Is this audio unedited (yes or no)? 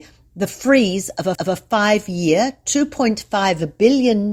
no